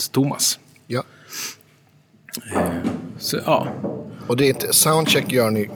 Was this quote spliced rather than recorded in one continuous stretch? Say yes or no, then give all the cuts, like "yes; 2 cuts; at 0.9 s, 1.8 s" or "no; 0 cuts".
no; 0 cuts